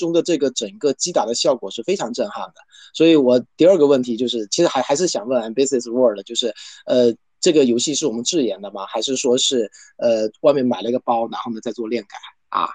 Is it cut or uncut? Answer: uncut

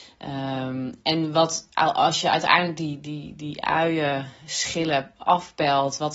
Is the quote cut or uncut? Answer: uncut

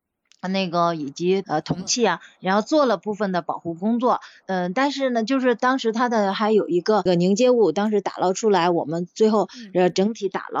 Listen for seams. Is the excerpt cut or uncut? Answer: uncut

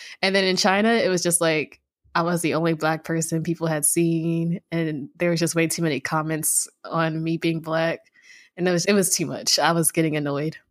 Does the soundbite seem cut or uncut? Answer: cut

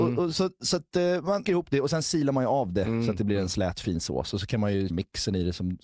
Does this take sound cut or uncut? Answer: cut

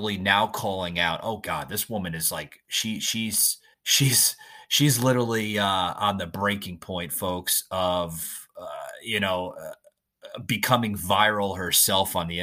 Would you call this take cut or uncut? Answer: cut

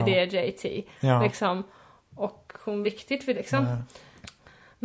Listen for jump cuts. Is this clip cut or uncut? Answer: cut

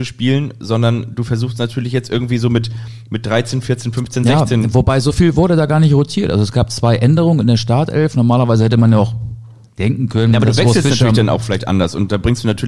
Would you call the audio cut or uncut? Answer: uncut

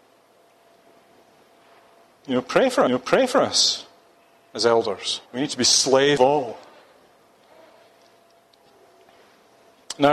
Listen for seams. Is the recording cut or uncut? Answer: cut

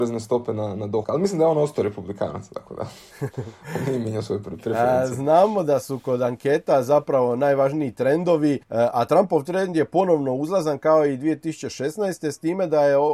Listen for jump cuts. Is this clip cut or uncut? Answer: cut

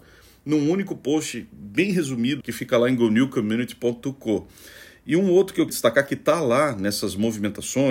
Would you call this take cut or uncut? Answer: cut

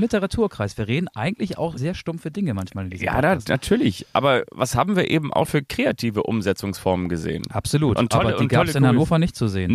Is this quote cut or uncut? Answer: cut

